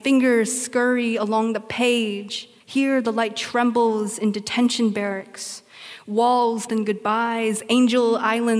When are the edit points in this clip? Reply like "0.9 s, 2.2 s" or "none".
2.6 s, 6.7 s